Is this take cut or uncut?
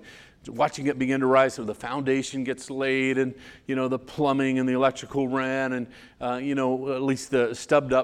uncut